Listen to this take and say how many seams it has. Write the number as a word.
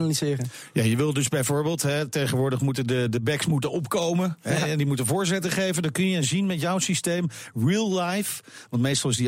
zero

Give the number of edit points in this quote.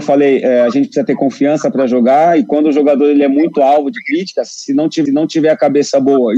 one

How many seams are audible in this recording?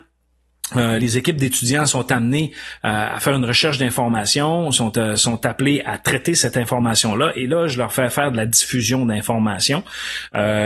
one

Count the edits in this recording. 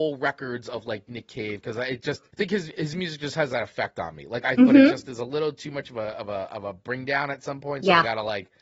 two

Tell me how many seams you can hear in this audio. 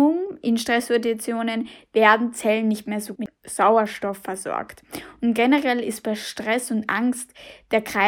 one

